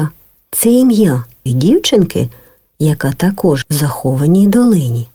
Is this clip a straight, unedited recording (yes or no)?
no